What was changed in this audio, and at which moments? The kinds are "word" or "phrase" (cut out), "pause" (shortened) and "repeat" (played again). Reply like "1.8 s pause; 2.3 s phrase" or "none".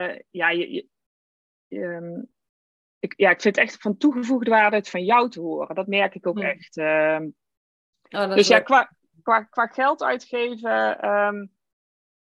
none